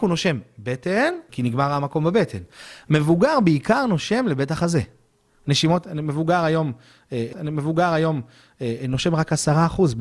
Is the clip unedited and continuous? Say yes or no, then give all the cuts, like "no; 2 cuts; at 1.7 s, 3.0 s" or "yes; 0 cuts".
no; 2 cuts; at 1.3 s, 7.3 s